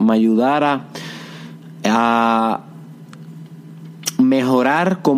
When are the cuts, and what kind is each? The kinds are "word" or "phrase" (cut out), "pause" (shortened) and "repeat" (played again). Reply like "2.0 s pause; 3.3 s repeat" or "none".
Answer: none